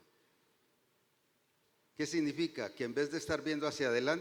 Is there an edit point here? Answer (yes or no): no